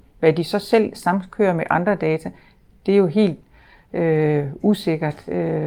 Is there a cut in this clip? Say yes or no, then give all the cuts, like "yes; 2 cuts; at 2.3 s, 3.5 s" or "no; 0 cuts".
no; 0 cuts